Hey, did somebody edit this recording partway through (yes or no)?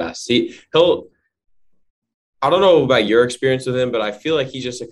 no